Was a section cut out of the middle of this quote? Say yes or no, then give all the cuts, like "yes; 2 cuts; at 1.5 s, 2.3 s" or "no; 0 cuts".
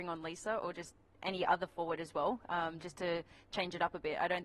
no; 0 cuts